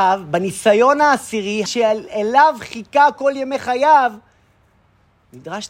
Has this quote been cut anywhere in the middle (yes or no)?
yes